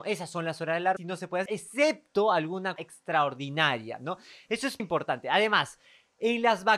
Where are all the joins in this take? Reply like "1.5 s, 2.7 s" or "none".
1.0 s, 1.5 s, 2.8 s, 4.8 s